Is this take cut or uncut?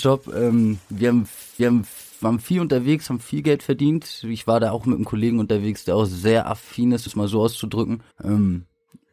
cut